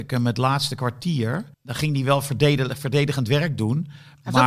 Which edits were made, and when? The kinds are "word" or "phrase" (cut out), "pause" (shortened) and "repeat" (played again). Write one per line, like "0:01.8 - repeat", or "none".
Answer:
0:01.5 - pause